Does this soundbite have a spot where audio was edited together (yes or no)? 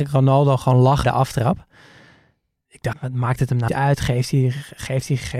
yes